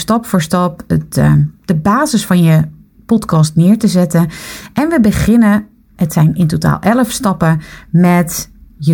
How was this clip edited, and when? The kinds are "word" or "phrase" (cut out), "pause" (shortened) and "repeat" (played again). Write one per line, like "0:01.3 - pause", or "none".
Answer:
none